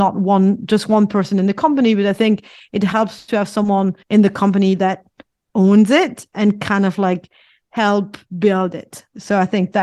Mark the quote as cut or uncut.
cut